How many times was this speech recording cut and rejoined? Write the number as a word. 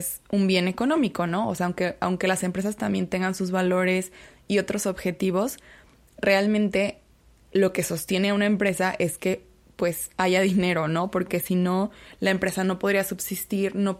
zero